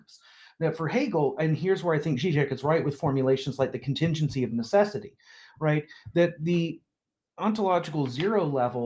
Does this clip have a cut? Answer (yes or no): no